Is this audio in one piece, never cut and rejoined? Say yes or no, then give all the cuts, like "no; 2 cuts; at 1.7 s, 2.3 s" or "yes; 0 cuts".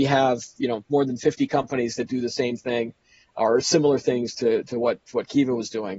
yes; 0 cuts